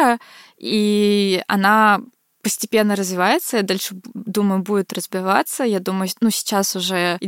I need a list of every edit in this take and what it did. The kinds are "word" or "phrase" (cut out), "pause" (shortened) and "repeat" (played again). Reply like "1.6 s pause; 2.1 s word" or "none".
none